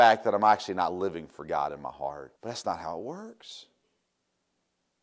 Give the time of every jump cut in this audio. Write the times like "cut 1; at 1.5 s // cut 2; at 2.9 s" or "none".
cut 1; at 2.4 s